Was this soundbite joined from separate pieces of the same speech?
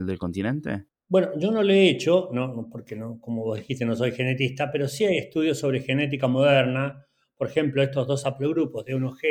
no; 0 cuts

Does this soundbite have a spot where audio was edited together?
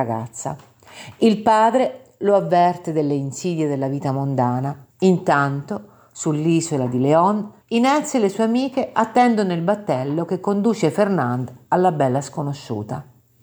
yes; 2 cuts; at 4.9 s, 7.6 s

